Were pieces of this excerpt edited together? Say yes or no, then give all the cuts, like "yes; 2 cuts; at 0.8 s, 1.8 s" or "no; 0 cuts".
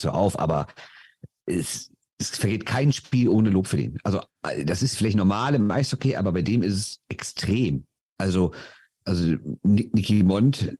no; 0 cuts